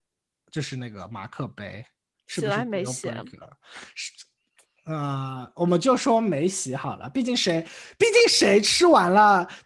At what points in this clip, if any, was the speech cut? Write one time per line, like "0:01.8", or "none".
none